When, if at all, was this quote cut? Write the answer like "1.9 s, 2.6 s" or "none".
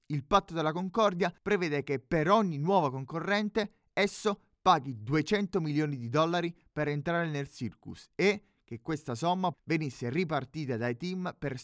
1.4 s, 9.5 s